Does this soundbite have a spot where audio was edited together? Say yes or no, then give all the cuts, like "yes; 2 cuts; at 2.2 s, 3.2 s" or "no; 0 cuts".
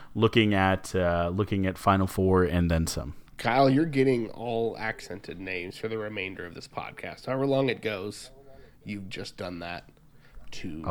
yes; 1 cut; at 3.3 s